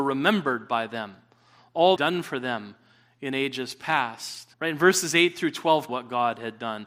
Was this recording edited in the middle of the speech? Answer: yes; 3 cuts; at 2.0 s, 4.5 s, 5.9 s

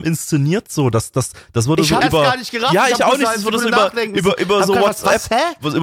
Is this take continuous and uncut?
no; 1 cut; at 2.0 s

